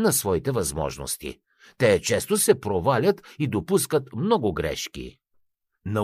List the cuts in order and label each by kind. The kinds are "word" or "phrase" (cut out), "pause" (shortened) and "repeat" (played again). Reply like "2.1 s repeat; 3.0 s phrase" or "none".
none